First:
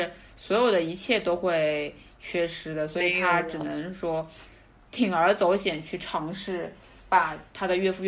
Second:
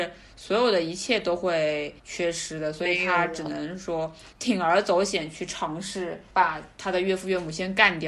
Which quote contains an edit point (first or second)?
second